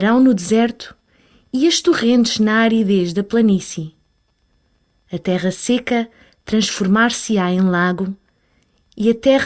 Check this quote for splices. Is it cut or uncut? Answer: uncut